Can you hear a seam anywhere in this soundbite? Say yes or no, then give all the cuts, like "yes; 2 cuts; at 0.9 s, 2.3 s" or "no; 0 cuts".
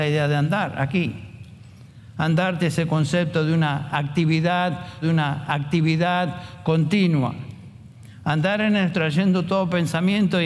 yes; 3 cuts; at 2.6 s, 5.0 s, 8.9 s